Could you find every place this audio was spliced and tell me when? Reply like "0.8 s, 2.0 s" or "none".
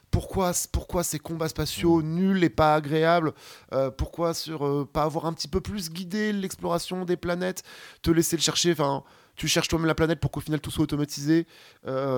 none